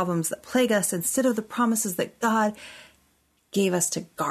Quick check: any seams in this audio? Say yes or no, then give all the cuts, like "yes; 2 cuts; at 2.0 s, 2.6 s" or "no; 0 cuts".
no; 0 cuts